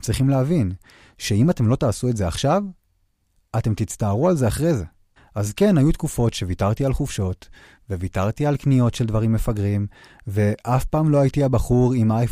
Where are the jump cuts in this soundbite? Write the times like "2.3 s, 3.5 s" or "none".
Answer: 5.2 s